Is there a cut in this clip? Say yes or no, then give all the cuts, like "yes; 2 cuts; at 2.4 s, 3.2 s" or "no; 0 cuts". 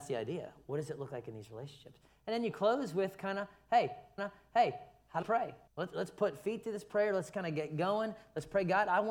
yes; 3 cuts; at 4.2 s, 5.2 s, 5.7 s